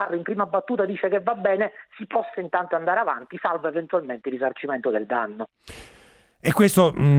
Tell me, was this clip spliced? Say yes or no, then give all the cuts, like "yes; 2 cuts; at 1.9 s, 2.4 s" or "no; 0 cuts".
no; 0 cuts